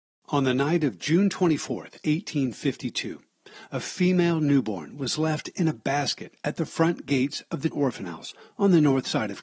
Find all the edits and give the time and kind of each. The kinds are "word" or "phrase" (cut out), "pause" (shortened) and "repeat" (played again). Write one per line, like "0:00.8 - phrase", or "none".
0:07.7 - word